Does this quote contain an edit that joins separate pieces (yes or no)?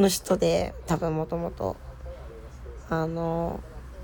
no